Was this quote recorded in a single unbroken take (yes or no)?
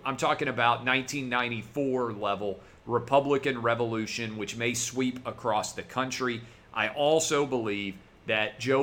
yes